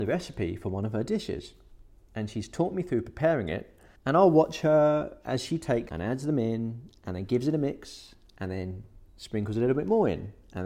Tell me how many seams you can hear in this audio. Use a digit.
2